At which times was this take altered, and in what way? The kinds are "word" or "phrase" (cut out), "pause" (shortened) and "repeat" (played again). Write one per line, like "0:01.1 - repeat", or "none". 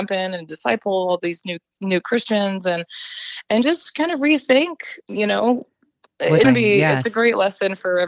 0:05.0 - pause
0:06.4 - phrase